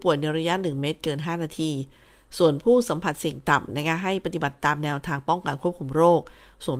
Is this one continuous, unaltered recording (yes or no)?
yes